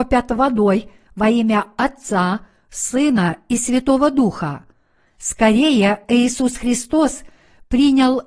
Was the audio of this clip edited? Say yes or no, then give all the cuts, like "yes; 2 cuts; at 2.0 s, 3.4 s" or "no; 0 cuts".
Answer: no; 0 cuts